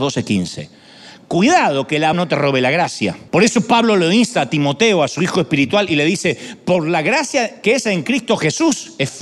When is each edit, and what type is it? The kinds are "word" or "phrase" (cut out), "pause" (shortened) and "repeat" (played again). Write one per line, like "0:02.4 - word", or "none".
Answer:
0:02.1 - word
0:03.3 - pause

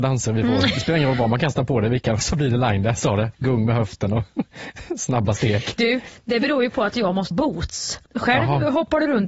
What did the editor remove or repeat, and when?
0:02.2 - word
0:03.3 - pause
0:07.3 - word
0:08.1 - pause

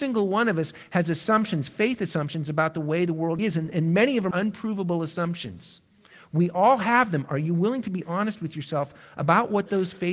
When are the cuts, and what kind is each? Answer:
0:03.4 - word
0:04.3 - word

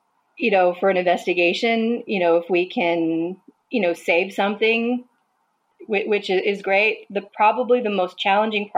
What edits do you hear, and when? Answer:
0:03.5 - pause

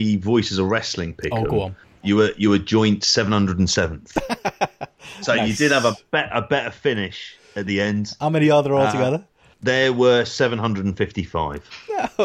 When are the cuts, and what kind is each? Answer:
0:01.8 - pause

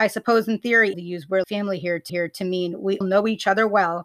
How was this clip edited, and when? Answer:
0:00.9 - phrase
0:01.4 - word
0:02.1 - repeat
0:03.0 - word

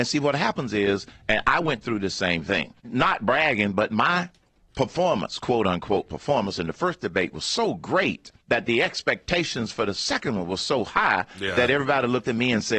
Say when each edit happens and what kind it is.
0:02.8 - pause
0:08.4 - pause

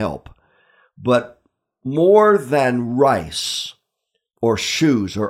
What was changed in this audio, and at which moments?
none

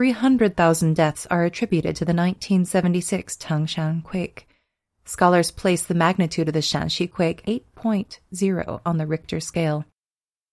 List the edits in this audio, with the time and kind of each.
0:07.4 - word

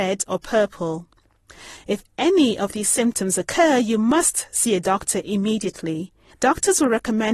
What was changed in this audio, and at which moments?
0:06.3 - pause

